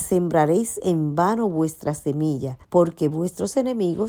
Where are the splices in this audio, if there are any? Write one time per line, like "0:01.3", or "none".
0:02.6